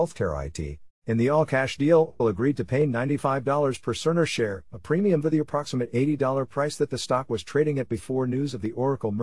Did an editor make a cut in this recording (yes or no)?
yes